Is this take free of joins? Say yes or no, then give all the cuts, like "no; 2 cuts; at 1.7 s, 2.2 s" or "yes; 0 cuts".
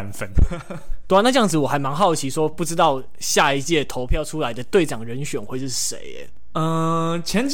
no; 1 cut; at 1.0 s